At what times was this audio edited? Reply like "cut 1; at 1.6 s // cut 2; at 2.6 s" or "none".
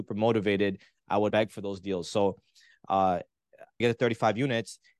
cut 1; at 1.3 s // cut 2; at 3.8 s